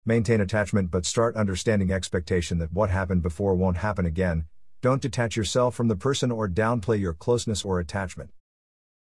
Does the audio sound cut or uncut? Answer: uncut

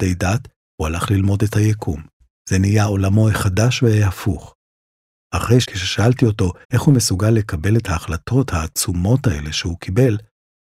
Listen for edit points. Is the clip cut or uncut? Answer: cut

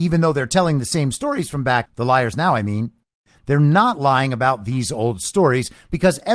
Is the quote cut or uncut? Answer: cut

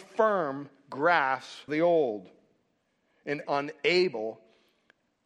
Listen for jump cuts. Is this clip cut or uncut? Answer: cut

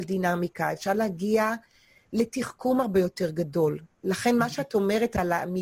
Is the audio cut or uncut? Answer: uncut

